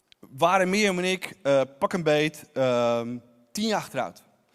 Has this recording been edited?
no; 0 cuts

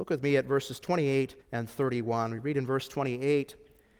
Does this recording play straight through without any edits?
no; 1 cut; at 1.4 s

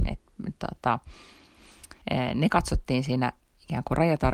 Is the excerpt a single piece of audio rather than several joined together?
no; 1 cut; at 2.0 s

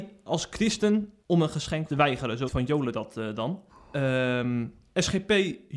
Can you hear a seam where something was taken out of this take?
yes; 4 cuts; at 1.2 s, 1.9 s, 2.5 s, 3.7 s

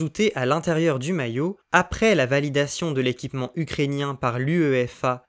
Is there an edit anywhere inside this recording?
no; 0 cuts

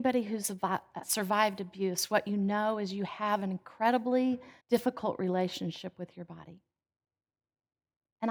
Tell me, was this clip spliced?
yes; 2 cuts; at 1.0 s, 4.6 s

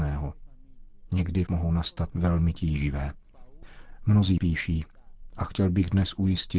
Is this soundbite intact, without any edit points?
no; 3 cuts; at 1.5 s, 2.1 s, 4.4 s

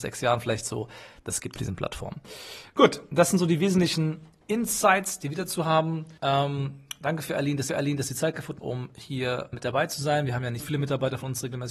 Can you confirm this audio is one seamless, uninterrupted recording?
no; 6 cuts; at 1.6 s, 6.2 s, 7.7 s, 8.6 s, 9.5 s, 10.6 s

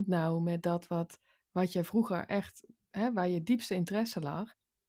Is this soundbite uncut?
yes; 0 cuts

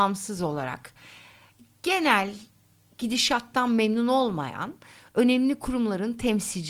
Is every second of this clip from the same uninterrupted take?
yes; 0 cuts

